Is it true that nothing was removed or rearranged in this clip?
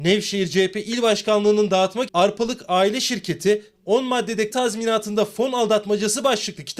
no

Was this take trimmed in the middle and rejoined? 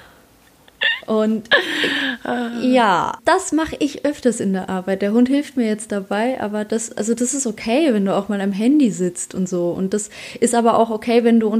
yes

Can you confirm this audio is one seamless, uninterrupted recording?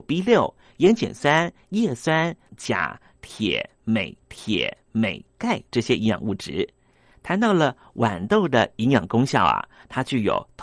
no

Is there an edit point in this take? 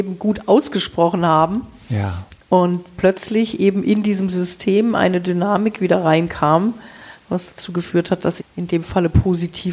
yes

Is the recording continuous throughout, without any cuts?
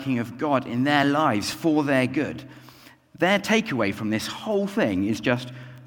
yes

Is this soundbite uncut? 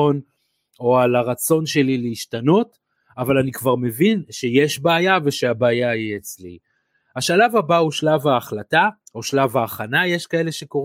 no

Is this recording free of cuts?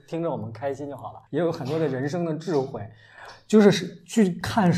no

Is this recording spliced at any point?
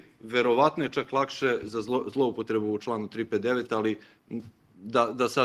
no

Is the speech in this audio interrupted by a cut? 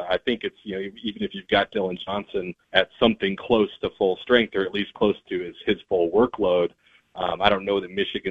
yes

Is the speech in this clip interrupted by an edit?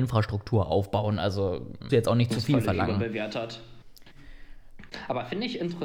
yes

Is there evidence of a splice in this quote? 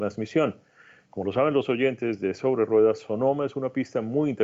no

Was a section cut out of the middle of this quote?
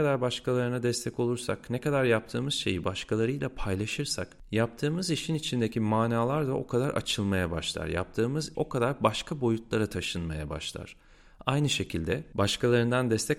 yes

